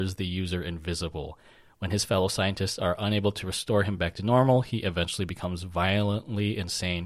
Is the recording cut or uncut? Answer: uncut